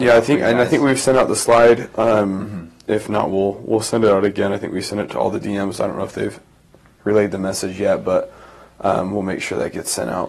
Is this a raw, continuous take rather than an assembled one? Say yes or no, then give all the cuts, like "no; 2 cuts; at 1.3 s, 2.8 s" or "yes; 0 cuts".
yes; 0 cuts